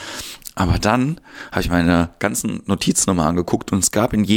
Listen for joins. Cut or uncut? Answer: uncut